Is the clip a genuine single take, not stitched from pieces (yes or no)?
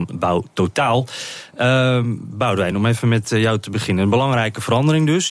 yes